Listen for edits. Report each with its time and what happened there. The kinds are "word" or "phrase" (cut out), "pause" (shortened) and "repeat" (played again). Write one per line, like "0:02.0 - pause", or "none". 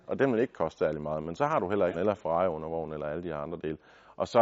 0:01.9 - word